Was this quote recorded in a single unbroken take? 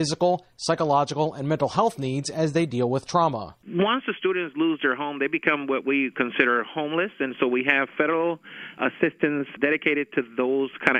yes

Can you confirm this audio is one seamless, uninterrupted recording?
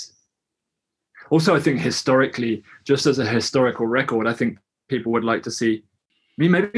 yes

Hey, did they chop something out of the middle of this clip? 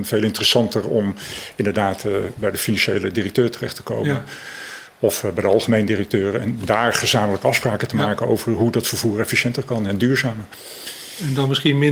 no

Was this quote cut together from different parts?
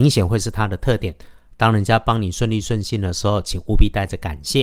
no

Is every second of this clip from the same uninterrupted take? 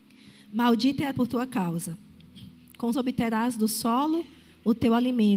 no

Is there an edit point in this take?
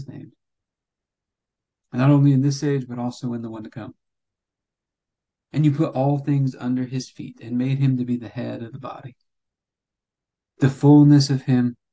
no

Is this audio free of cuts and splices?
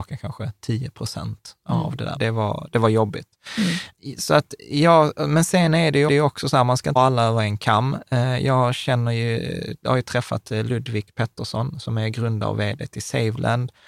no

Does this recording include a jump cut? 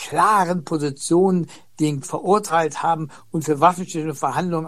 yes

